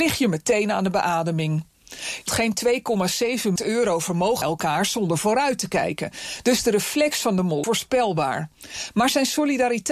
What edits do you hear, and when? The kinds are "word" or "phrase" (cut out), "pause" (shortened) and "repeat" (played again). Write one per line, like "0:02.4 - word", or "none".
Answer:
0:02.3 - word
0:03.6 - word
0:04.4 - word
0:07.6 - word

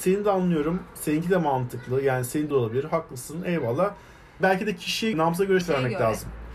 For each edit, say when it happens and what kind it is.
0:02.5 - word
0:04.4 - word
0:05.1 - word
0:05.6 - word

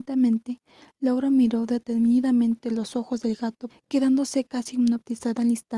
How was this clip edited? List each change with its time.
0:03.7 - phrase

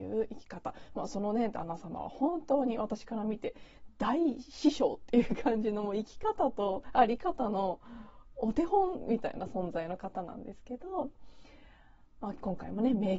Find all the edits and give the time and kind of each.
none

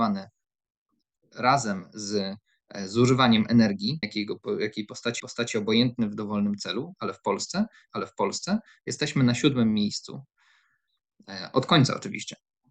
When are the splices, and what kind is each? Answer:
0:04.0 - word
0:05.2 - repeat
0:07.9 - repeat

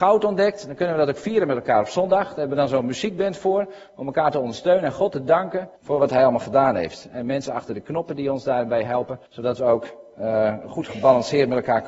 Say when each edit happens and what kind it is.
0:05.8 - pause
0:09.3 - pause

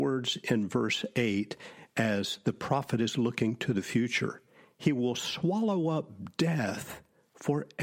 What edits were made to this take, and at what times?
none

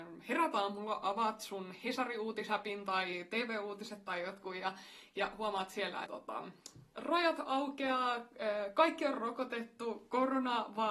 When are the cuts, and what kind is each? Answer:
0:06.1 - phrase

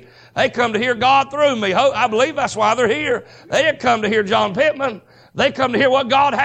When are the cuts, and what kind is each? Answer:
none

